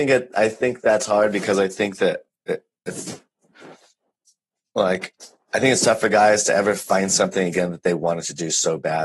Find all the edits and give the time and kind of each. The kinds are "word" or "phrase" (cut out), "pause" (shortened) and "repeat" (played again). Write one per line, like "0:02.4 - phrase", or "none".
none